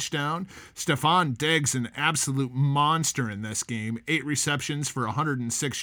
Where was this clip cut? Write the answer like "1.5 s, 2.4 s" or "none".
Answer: none